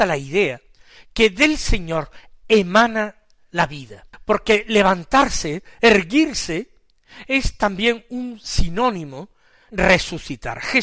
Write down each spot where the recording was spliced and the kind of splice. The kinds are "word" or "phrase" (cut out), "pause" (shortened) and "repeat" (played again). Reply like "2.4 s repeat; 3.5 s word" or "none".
9.7 s word